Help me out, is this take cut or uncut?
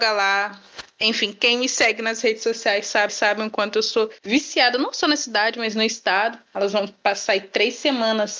cut